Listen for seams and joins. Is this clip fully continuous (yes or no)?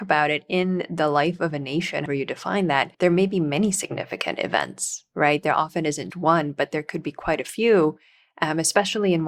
no